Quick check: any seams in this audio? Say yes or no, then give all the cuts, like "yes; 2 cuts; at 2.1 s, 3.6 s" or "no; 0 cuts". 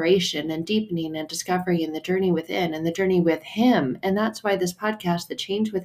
no; 0 cuts